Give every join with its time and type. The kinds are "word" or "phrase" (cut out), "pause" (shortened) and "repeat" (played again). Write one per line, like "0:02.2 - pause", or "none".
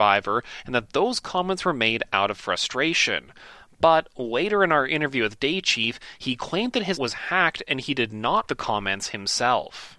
0:07.0 - word
0:08.5 - word